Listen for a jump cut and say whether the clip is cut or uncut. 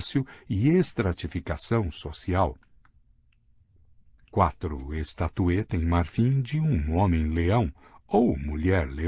uncut